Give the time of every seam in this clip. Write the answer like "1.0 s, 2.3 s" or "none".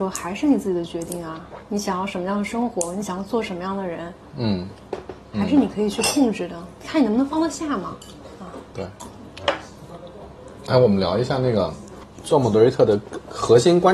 1.7 s

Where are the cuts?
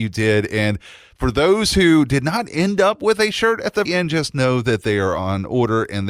3.8 s

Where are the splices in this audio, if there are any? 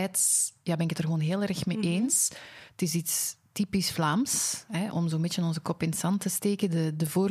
4.9 s

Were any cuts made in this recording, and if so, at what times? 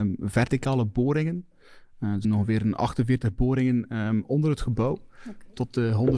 2.2 s

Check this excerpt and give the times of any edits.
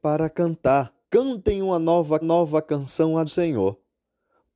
1.0 s, 2.2 s, 3.3 s

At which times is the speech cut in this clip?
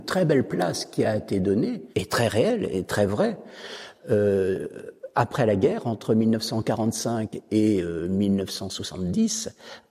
1.9 s

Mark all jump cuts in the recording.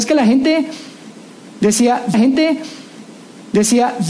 2.1 s

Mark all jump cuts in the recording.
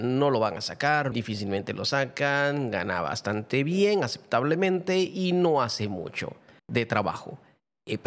1.1 s, 6.6 s

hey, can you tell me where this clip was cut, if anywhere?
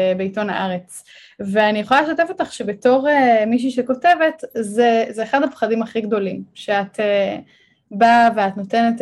none

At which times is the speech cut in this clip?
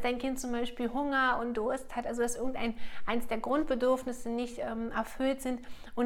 none

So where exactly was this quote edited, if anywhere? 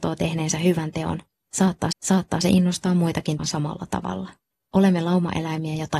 1.9 s, 3.4 s, 4.5 s

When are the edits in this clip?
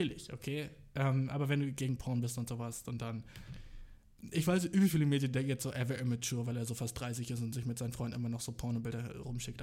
none

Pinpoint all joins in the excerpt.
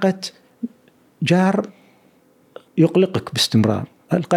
2.7 s

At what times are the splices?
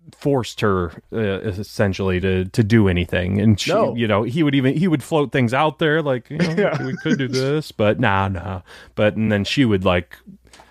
none

